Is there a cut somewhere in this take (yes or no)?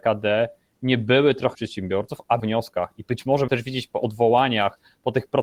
yes